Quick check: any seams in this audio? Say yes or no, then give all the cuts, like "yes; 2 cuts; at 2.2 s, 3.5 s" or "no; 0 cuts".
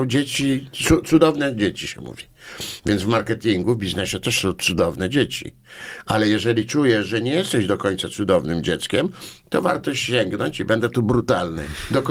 no; 0 cuts